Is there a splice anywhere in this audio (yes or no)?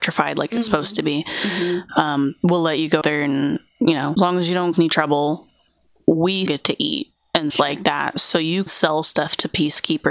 yes